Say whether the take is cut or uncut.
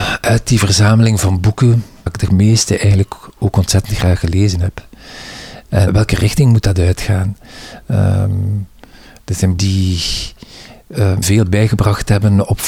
cut